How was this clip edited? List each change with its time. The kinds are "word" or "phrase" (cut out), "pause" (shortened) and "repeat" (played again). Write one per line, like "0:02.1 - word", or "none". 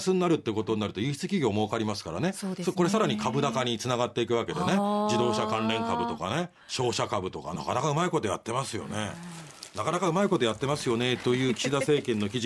0:06.6 - pause
0:07.6 - phrase